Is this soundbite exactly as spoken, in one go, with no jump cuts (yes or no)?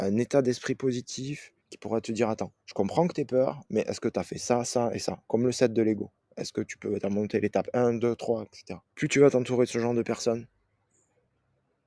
no